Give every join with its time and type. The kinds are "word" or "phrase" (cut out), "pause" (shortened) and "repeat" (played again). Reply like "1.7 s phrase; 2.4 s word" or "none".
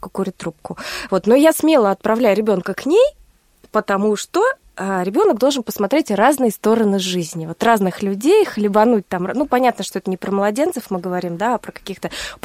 none